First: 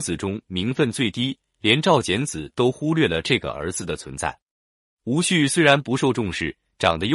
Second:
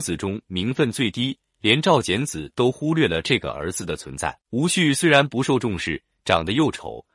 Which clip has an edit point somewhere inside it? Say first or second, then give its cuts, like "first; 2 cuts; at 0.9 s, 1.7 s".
second; 1 cut; at 4.4 s